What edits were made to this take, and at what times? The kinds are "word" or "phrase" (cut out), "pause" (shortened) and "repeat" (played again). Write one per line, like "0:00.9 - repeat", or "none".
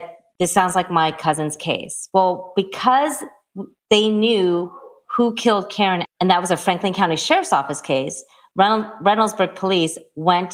0:06.0 - word